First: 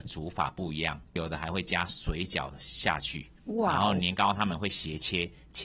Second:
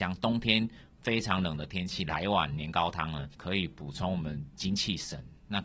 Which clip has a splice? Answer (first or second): second